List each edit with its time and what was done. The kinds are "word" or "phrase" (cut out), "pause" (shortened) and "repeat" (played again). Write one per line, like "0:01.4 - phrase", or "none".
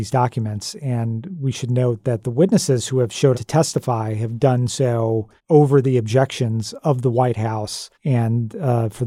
0:03.3 - word
0:05.4 - pause
0:07.9 - pause